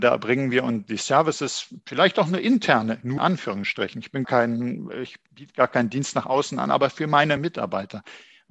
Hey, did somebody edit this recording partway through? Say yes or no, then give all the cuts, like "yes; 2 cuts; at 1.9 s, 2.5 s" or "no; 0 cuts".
yes; 3 cuts; at 3.2 s, 4.2 s, 7.4 s